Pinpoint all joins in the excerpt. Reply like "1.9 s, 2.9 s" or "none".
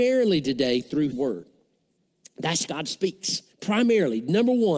1.1 s, 2.7 s, 3.5 s